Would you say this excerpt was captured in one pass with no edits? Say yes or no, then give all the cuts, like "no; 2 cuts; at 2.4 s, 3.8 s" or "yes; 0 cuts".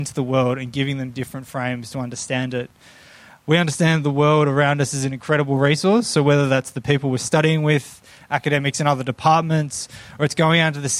yes; 0 cuts